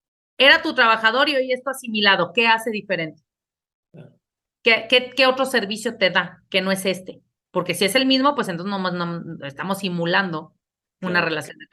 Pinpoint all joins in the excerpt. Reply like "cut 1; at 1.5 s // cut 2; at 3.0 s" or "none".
none

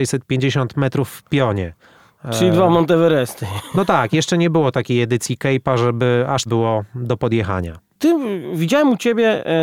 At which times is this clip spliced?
cut 1; at 6.5 s

